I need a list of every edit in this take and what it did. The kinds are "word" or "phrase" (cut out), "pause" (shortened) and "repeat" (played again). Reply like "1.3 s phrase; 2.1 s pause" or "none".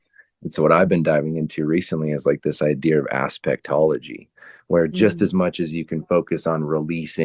none